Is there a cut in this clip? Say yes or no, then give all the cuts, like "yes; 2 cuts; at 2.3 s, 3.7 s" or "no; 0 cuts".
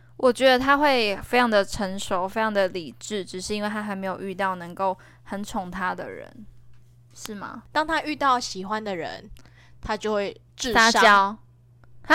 no; 0 cuts